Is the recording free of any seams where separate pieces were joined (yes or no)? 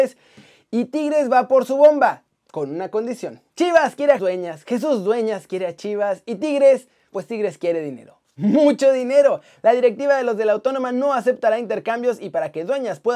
no